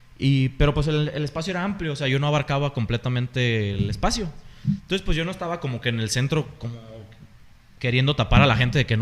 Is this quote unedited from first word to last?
yes; 0 cuts

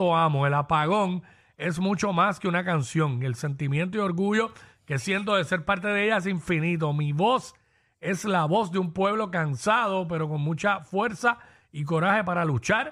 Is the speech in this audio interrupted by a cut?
no; 0 cuts

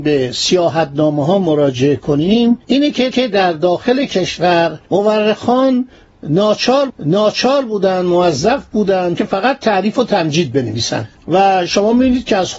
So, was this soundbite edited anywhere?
yes; 6 cuts; at 2.6 s, 3.1 s, 4.9 s, 6.9 s, 9.2 s, 11.2 s

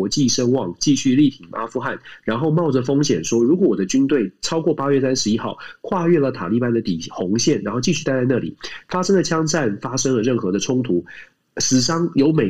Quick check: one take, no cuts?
yes; 0 cuts

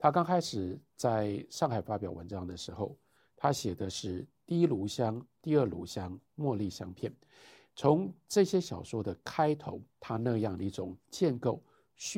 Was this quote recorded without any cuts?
no; 2 cuts; at 6.3 s, 9.9 s

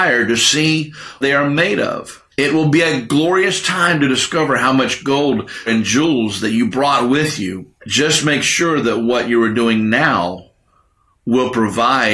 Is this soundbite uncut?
no; 4 cuts; at 1.2 s, 2.3 s, 5.7 s, 7.8 s

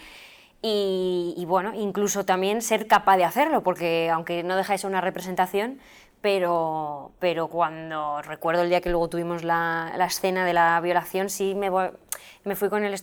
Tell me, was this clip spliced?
no; 0 cuts

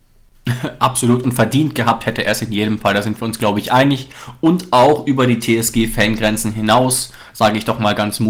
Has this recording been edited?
no; 0 cuts

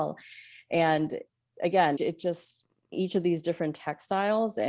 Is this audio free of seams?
no; 3 cuts; at 1.5 s, 2.0 s, 2.9 s

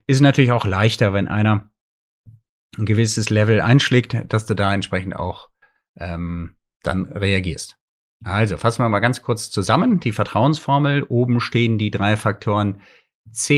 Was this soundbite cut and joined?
no; 0 cuts

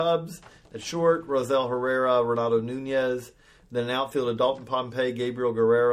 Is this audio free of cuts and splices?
yes; 0 cuts

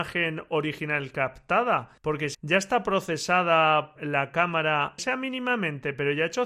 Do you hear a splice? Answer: yes; 4 cuts; at 2.0 s, 2.3 s, 4.0 s, 5.0 s

